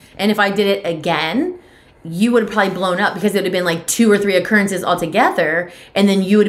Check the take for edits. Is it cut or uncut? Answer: uncut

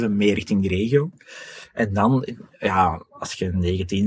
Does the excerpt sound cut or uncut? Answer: uncut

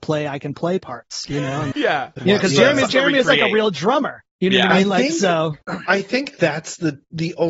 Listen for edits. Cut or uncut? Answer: cut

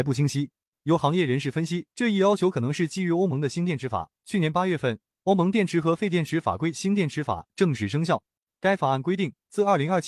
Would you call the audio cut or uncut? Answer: cut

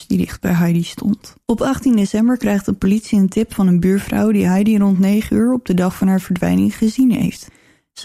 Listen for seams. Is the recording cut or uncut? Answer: cut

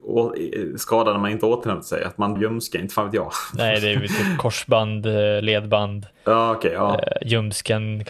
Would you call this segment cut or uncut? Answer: cut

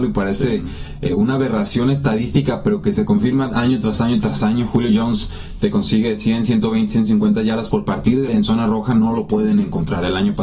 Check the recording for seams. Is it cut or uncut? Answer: cut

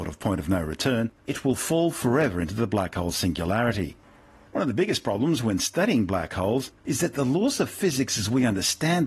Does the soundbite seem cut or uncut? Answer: uncut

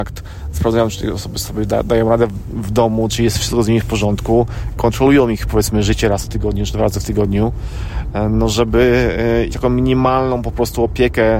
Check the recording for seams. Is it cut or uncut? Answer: cut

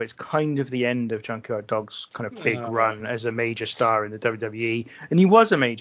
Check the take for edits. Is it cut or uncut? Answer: uncut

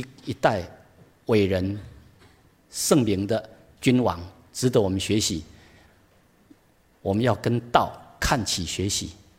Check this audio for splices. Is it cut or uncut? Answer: uncut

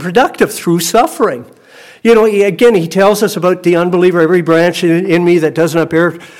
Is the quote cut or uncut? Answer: uncut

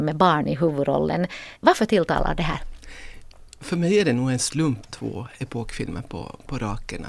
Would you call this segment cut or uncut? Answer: cut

